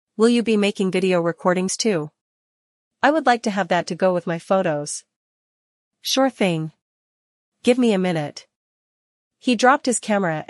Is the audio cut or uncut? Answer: uncut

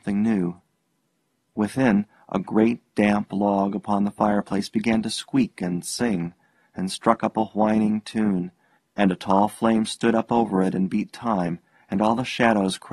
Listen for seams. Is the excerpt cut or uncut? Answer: uncut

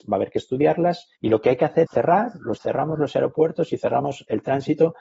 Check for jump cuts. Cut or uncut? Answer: cut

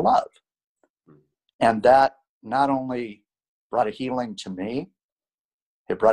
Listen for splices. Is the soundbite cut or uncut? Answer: uncut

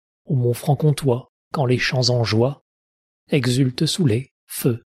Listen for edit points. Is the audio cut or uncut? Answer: uncut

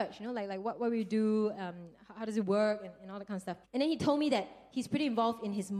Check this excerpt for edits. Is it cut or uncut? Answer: cut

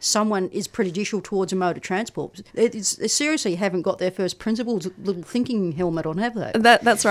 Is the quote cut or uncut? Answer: cut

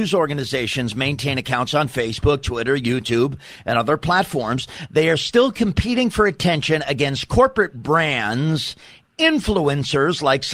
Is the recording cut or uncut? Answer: uncut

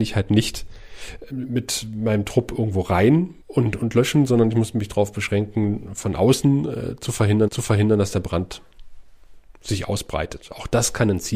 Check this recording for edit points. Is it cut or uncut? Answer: cut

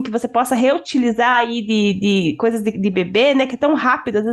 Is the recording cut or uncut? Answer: uncut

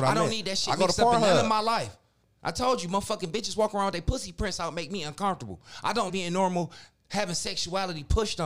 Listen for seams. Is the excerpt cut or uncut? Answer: cut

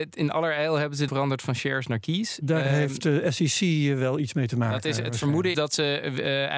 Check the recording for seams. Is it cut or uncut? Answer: cut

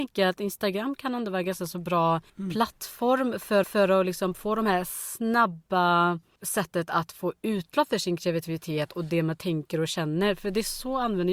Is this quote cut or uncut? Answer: cut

